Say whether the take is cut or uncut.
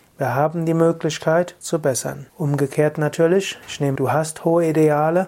cut